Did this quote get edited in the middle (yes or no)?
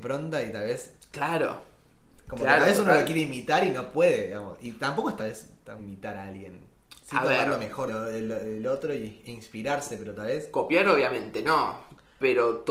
yes